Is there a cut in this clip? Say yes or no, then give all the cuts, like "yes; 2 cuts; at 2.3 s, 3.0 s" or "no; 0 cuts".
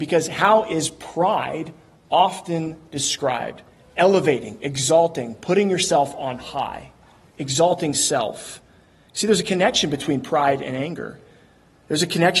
no; 0 cuts